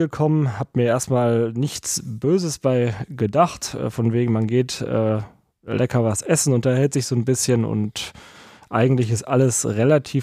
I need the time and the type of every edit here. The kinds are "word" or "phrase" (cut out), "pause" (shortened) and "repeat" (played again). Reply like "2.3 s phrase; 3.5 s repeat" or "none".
none